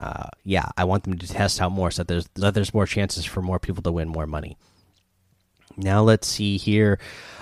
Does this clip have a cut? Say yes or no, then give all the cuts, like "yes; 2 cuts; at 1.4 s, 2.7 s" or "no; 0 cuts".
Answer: yes; 1 cut; at 2.4 s